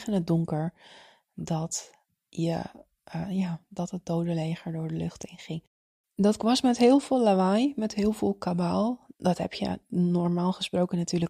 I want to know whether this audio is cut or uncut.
uncut